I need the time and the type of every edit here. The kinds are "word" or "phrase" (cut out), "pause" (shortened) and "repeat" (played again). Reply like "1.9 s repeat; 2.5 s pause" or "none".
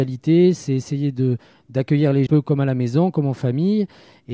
2.3 s phrase